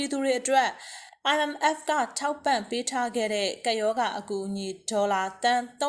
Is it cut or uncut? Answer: uncut